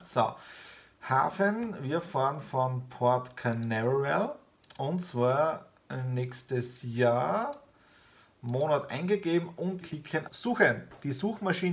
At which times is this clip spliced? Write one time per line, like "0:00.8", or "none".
0:09.8
0:10.3